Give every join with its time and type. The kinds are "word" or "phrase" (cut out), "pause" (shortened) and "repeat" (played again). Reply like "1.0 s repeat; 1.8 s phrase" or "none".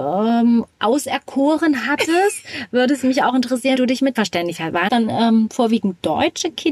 3.8 s word; 4.2 s word; 4.9 s word